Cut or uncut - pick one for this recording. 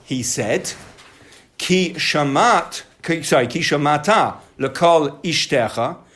uncut